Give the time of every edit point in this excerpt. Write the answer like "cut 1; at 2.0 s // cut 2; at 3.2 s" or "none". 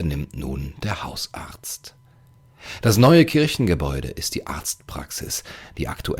none